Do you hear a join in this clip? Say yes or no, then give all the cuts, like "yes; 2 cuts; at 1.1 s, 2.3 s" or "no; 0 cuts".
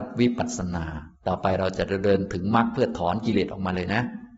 yes; 1 cut; at 1.1 s